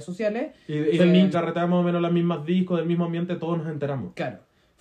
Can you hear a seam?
yes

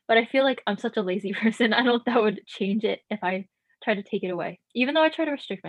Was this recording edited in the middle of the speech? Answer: yes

